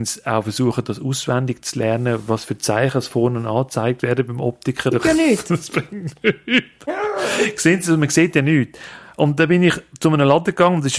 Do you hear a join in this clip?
yes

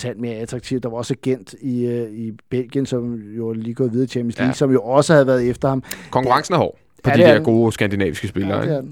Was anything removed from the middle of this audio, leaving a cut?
no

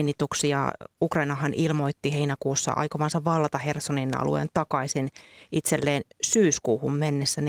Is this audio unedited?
yes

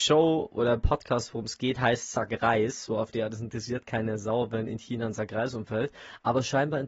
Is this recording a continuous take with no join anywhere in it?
yes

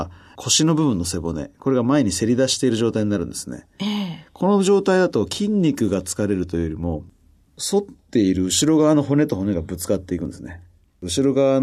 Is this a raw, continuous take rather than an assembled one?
yes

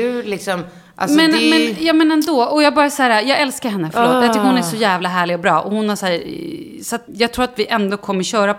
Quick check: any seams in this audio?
yes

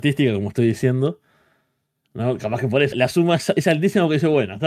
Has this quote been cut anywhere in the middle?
yes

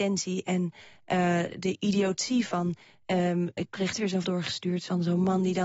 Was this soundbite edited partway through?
yes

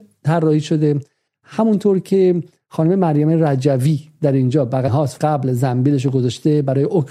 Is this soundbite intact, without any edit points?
no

